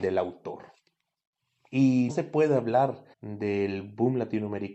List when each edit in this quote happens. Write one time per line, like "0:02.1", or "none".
0:02.1
0:03.1